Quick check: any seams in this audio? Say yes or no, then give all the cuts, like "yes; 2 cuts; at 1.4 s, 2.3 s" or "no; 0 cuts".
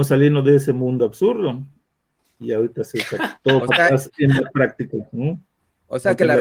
no; 0 cuts